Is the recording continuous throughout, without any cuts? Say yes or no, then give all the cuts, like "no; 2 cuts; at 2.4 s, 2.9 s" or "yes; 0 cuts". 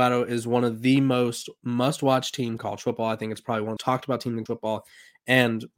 no; 3 cuts; at 2.6 s, 3.8 s, 4.5 s